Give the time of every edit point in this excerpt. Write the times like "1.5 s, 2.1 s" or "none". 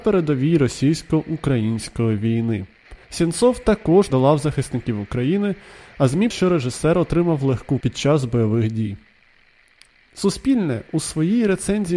3.0 s, 4.1 s, 6.3 s, 7.8 s